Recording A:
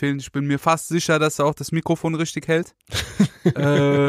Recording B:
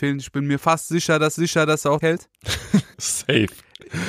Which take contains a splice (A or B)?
B